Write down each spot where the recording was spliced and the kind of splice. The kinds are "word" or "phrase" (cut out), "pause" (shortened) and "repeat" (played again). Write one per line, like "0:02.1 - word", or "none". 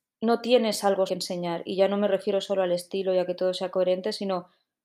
0:01.1 - word

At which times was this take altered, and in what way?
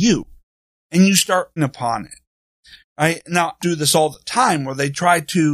0:01.6 - word
0:03.6 - word

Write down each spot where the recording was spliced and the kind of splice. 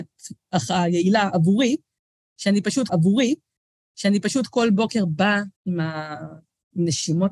0:02.9 - repeat
0:05.6 - pause

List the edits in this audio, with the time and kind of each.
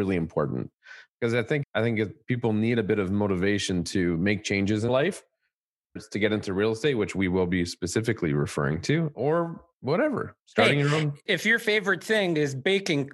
0:01.6 - word
0:04.9 - word
0:06.0 - word
0:09.7 - pause
0:11.3 - word

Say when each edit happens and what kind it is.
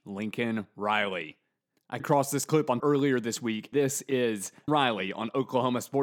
0:02.0 - word
0:02.8 - word
0:03.7 - word
0:04.7 - word

